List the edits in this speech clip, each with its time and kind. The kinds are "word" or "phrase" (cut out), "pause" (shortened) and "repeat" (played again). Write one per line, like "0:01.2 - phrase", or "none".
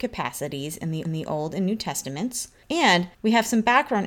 0:01.0 - repeat
0:03.1 - pause